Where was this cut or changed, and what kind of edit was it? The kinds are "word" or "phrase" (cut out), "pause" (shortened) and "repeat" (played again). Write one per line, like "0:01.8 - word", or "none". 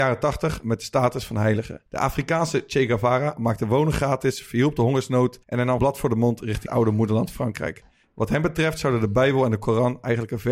0:01.9 - pause
0:05.4 - pause
0:05.8 - word
0:06.7 - word